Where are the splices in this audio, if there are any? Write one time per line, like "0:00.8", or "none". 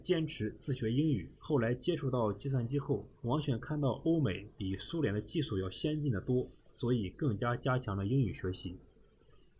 0:01.4
0:03.2
0:06.6